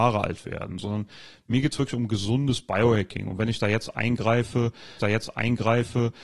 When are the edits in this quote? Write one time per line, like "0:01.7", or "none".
0:05.0